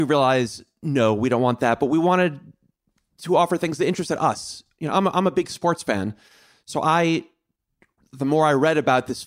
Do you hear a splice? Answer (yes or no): no